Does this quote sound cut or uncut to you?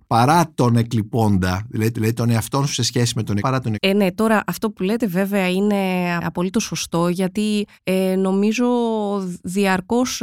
cut